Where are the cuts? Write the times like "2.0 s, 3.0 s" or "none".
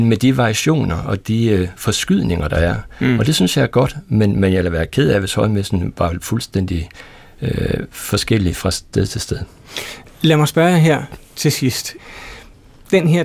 none